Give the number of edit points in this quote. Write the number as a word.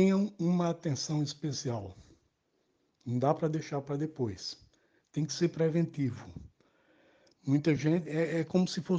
zero